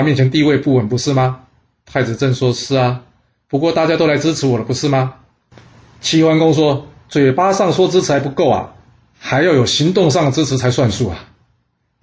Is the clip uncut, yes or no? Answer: yes